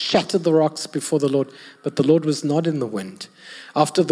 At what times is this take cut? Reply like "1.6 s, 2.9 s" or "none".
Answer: none